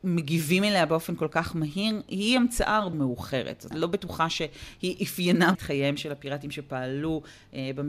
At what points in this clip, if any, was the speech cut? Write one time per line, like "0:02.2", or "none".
0:02.9
0:03.7
0:05.5